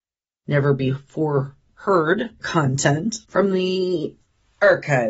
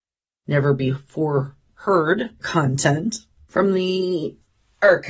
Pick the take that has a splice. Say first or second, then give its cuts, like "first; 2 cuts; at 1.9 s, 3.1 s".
first; 1 cut; at 3.2 s